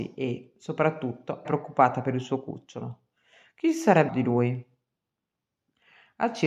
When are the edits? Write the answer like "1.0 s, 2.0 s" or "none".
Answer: 1.4 s, 4.1 s